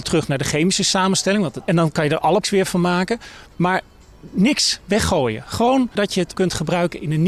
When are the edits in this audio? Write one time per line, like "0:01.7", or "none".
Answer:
0:01.7
0:02.4
0:03.5
0:06.0
0:06.3